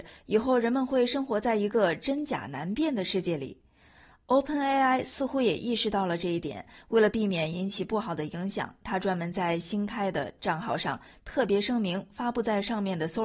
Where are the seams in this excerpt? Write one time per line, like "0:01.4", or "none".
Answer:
0:10.4